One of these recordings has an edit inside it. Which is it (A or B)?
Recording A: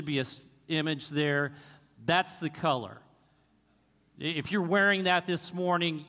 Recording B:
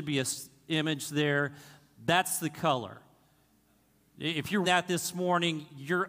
B